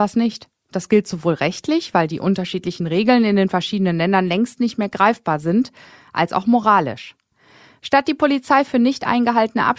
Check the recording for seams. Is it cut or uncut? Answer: uncut